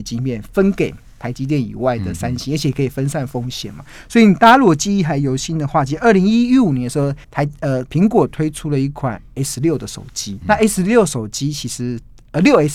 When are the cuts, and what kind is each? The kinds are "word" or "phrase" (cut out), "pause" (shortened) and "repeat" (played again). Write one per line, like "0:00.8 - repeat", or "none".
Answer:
0:07.2 - pause
0:10.4 - word